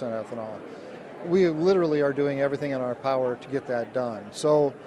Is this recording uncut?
yes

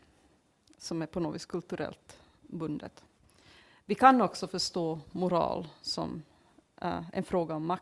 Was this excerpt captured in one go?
yes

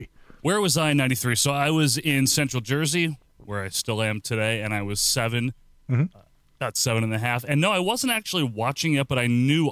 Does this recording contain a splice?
no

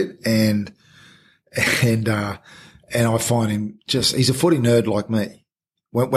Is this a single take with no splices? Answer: yes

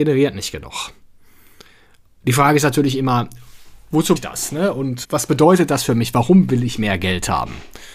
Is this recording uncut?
no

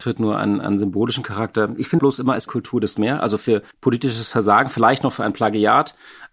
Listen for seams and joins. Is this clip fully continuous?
no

